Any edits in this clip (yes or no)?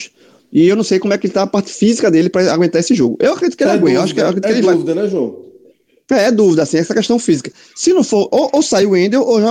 no